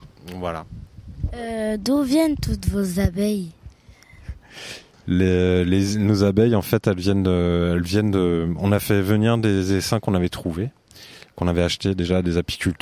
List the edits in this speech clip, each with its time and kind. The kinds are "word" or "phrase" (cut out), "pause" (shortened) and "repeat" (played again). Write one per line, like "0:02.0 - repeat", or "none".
none